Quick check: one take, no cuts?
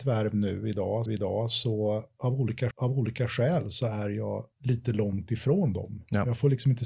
no; 3 cuts; at 1.1 s, 2.7 s, 4.5 s

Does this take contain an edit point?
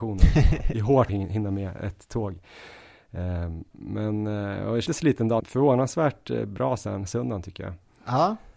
yes; 3 cuts; at 1.1 s, 4.9 s, 5.4 s

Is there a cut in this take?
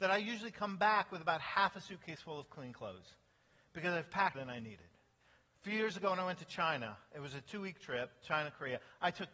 yes; 1 cut; at 4.3 s

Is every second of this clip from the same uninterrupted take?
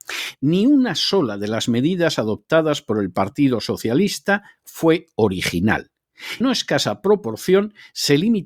no; 1 cut; at 6.4 s

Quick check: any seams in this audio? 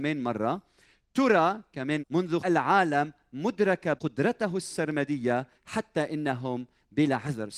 yes; 4 cuts; at 2.0 s, 2.4 s, 4.0 s, 5.5 s

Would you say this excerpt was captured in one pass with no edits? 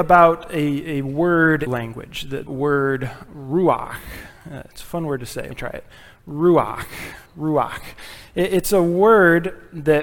no; 4 cuts; at 1.7 s, 2.5 s, 5.5 s, 7.3 s

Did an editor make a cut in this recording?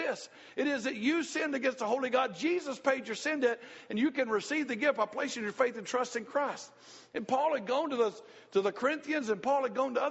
no; 0 cuts

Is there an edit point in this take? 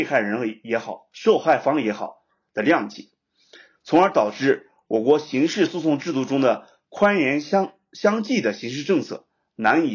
no; 0 cuts

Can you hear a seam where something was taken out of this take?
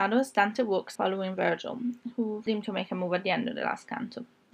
yes; 2 cuts; at 1.0 s, 2.5 s

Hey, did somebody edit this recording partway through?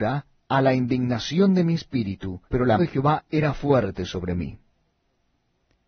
yes; 2 cuts; at 2.5 s, 2.8 s

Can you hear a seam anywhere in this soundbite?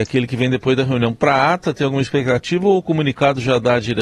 no; 0 cuts

